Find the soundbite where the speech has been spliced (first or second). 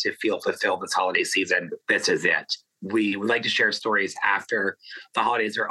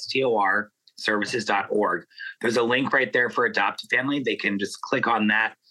first